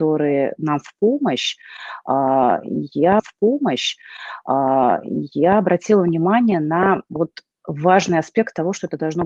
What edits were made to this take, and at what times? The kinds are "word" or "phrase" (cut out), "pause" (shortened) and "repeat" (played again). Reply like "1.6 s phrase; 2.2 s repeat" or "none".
3.2 s repeat